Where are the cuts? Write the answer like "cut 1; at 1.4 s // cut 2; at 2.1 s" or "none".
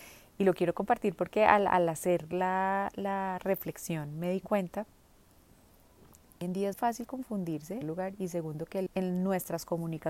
cut 1; at 6.4 s // cut 2; at 6.7 s // cut 3; at 7.8 s // cut 4; at 8.9 s